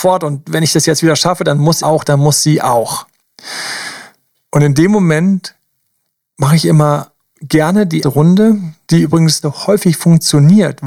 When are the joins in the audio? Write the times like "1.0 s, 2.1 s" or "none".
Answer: 1.8 s, 8.0 s, 8.9 s, 9.4 s